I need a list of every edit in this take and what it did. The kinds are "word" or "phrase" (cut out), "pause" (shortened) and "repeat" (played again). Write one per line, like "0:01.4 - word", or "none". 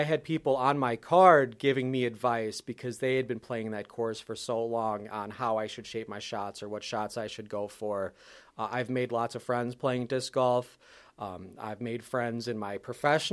none

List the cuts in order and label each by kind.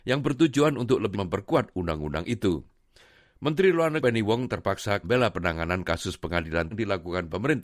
0:01.1 - word
0:04.0 - word
0:05.0 - word
0:06.7 - word

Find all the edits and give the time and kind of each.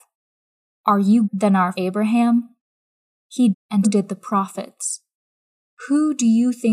0:01.2 - word
0:01.7 - word
0:03.5 - word
0:03.8 - word

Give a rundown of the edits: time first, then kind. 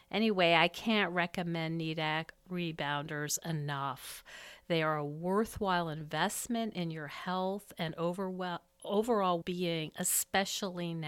0:09.4 - word

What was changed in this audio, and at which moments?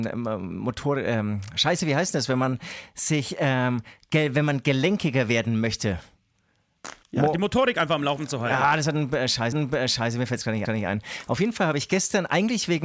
0:07.0 - pause
0:09.5 - repeat
0:10.6 - repeat

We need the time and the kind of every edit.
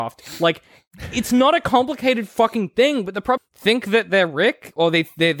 0:03.4 - phrase

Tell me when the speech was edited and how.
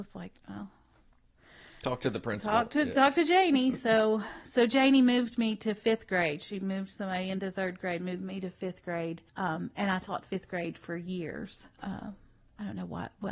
0:09.3 - pause
0:11.7 - pause

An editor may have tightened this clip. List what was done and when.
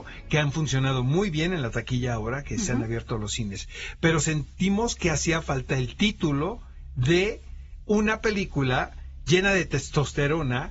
none

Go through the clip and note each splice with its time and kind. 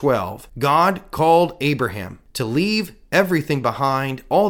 none

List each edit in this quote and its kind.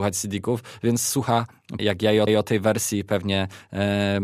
0:01.8 - word
0:02.3 - repeat

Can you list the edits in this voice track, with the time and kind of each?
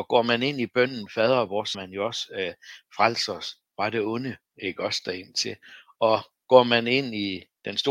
0:01.7 - word
0:04.5 - pause

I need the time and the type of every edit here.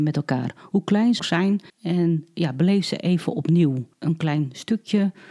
0:01.2 - word
0:01.7 - pause
0:03.9 - pause

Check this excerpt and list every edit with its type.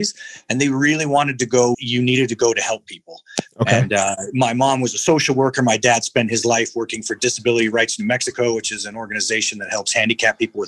0:01.7 - word

